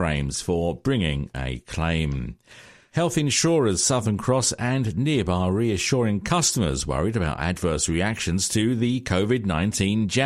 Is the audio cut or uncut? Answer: uncut